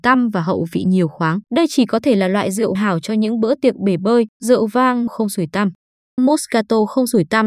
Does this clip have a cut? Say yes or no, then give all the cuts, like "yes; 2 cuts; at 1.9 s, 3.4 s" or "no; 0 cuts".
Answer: yes; 5 cuts; at 1.5 s, 2.7 s, 4.3 s, 5.1 s, 6.2 s